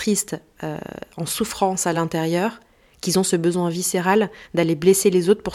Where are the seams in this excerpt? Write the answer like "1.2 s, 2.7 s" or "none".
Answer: none